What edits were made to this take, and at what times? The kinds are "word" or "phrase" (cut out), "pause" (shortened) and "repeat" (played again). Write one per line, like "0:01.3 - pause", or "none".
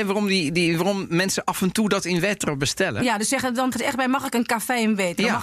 0:03.7 - word